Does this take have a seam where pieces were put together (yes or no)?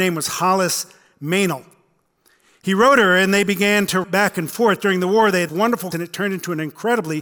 yes